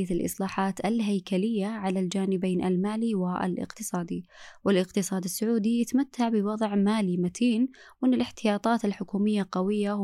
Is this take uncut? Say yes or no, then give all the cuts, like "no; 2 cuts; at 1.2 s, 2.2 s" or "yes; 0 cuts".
yes; 0 cuts